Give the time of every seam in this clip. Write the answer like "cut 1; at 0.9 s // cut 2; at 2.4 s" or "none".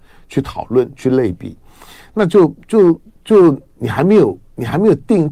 none